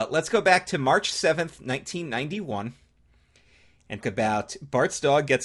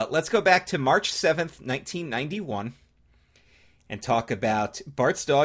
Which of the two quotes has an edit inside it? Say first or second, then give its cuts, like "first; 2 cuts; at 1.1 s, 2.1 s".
first; 1 cut; at 4.0 s